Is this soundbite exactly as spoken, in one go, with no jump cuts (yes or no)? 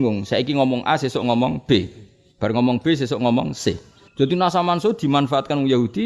yes